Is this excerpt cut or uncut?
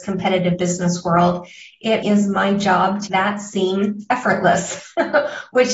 cut